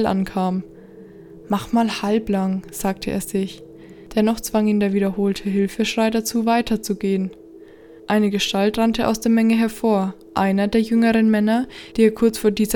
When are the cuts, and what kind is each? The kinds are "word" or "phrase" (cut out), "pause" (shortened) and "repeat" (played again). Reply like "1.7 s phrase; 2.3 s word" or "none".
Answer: none